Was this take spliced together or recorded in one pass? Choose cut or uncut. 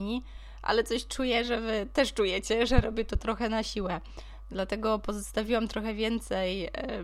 uncut